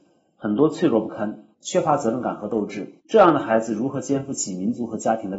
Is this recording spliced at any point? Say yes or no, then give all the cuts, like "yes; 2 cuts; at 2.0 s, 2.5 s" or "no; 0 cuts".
yes; 2 cuts; at 1.5 s, 3.0 s